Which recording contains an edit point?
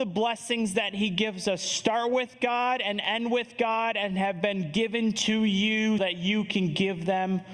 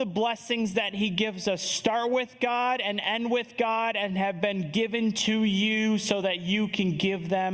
first; 1 cut; at 6.0 s

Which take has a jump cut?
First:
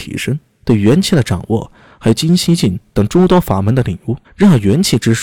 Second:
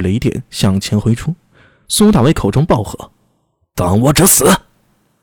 first; 1 cut; at 4.2 s

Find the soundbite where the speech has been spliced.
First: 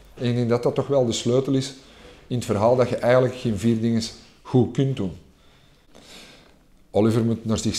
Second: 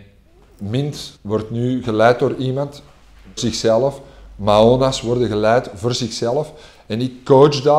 second; 2 cuts; at 1.2 s, 3.4 s

